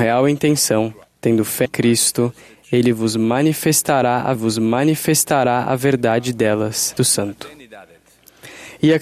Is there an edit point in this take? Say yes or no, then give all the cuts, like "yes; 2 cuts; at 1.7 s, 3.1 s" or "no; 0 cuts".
yes; 4 cuts; at 1.0 s, 1.6 s, 4.3 s, 7.0 s